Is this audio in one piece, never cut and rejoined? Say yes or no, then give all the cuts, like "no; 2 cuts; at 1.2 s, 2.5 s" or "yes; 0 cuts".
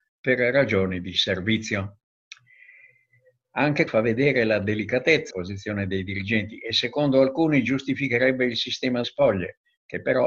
no; 3 cuts; at 3.9 s, 5.3 s, 9.0 s